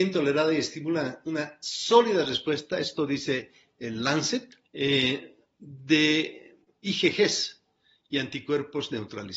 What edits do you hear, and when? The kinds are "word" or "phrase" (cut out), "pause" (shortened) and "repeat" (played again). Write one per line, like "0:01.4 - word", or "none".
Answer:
0:04.6 - pause